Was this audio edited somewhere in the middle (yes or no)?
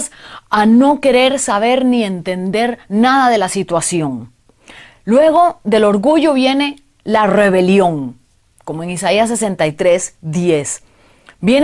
no